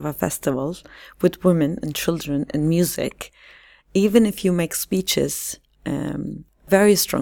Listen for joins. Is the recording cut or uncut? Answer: uncut